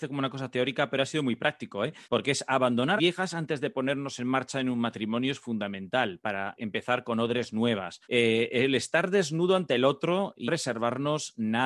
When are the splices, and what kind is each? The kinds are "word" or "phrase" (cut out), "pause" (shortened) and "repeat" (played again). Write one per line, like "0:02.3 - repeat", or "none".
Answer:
0:02.0 - pause
0:03.0 - word
0:06.6 - word
0:08.0 - pause
0:10.5 - word